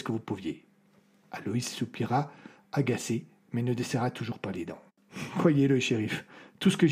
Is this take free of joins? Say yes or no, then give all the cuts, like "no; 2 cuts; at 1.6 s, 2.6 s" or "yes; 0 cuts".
no; 1 cut; at 4.9 s